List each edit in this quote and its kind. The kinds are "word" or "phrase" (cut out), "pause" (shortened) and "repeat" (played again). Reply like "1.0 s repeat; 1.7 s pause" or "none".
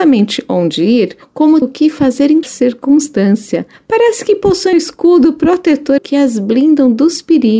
1.6 s word; 2.4 s word; 4.7 s word; 6.0 s word